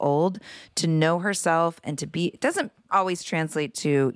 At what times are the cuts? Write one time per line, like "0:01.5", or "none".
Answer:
none